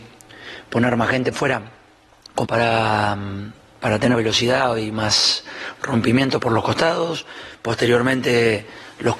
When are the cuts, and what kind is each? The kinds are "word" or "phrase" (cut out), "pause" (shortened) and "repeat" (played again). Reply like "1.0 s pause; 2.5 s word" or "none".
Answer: 1.3 s word; 2.4 s word; 4.1 s word; 6.4 s word